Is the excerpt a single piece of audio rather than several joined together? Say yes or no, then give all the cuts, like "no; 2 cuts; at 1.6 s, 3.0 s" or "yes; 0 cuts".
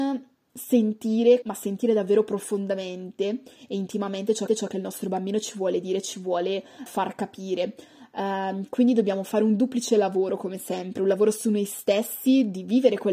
no; 3 cuts; at 1.4 s, 4.5 s, 6.9 s